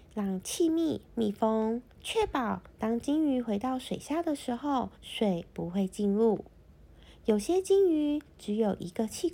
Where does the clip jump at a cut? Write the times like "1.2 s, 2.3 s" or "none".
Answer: 1.9 s, 4.9 s